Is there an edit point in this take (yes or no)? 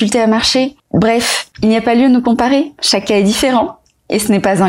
no